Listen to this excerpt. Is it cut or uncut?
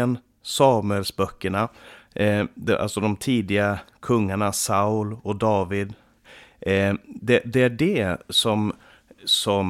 uncut